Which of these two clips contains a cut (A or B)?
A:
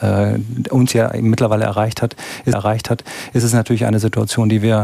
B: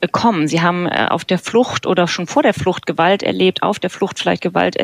A